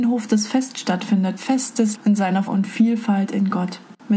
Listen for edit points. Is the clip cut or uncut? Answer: cut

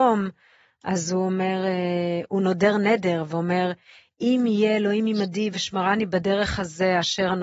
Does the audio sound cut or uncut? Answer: uncut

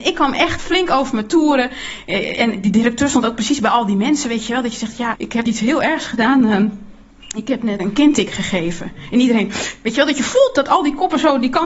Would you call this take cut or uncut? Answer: cut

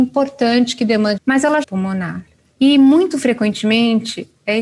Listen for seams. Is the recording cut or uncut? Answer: cut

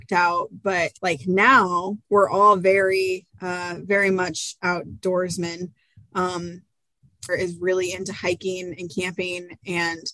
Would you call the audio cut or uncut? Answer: cut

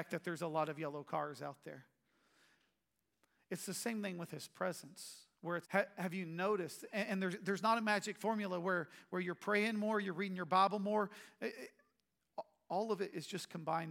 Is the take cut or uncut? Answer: cut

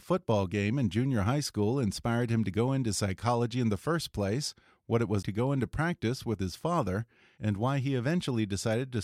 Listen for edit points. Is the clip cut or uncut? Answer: cut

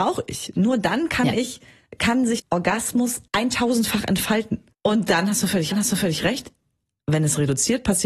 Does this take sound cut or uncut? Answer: cut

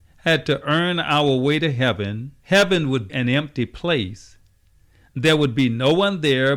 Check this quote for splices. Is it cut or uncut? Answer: cut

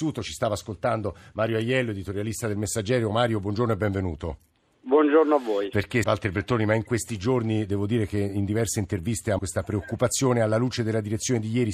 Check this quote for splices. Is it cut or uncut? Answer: cut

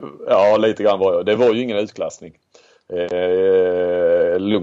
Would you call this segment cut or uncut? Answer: uncut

